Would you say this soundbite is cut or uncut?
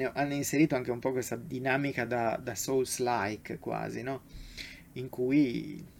uncut